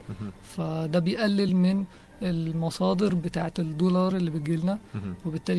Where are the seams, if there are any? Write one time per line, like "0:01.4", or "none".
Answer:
none